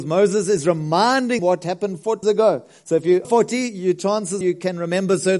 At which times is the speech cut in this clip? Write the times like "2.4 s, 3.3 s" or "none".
1.4 s, 2.2 s, 3.2 s, 4.4 s

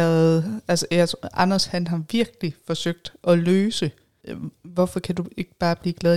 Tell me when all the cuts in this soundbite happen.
none

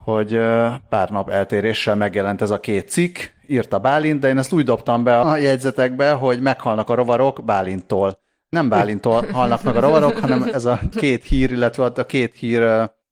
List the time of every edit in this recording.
5.2 s, 8.5 s, 10.9 s

